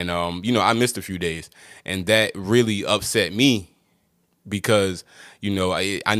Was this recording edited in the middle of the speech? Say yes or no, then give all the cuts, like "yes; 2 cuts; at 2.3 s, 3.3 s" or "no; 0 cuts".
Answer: no; 0 cuts